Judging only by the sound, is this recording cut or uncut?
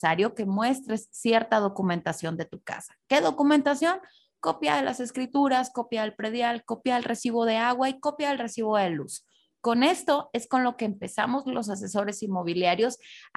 uncut